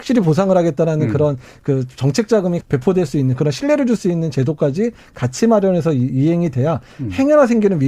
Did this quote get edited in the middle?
yes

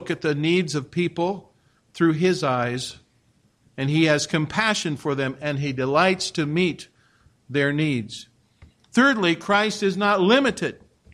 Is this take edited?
no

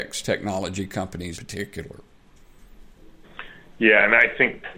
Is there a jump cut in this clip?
yes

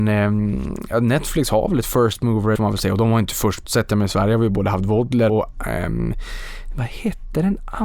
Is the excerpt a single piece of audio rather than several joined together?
no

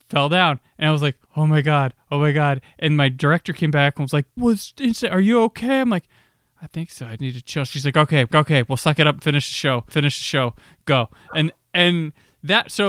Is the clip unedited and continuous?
no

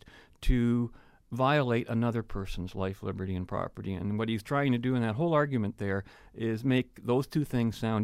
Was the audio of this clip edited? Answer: no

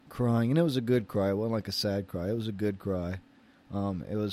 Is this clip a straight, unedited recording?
yes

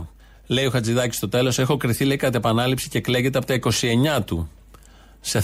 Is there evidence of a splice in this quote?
no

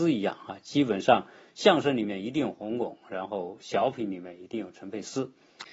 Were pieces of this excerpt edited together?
no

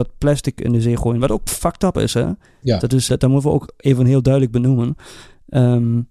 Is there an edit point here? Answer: yes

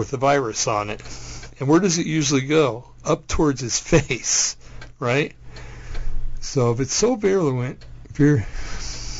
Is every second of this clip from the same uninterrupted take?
yes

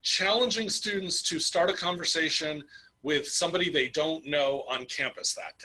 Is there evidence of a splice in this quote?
no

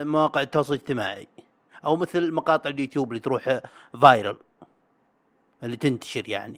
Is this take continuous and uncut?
yes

